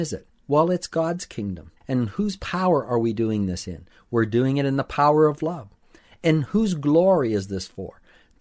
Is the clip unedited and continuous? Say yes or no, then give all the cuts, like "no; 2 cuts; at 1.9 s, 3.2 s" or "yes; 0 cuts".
no; 1 cut; at 1.8 s